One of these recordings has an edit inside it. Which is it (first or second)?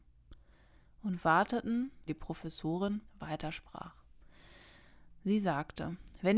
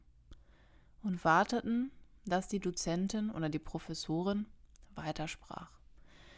first